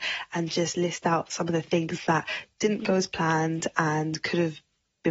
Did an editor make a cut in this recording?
no; 0 cuts

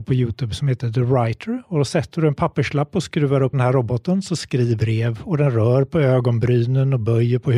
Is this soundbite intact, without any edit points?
no; 2 cuts; at 3.5 s, 4.8 s

